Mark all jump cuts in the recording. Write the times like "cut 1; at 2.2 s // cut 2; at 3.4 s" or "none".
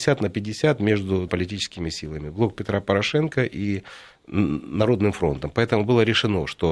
cut 1; at 1.3 s